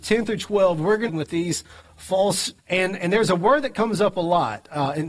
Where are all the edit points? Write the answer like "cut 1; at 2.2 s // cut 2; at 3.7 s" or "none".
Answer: cut 1; at 1.1 s // cut 2; at 2.6 s